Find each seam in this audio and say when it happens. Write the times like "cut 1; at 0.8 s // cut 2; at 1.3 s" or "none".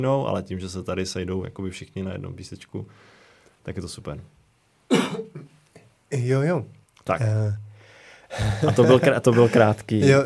cut 1; at 6.8 s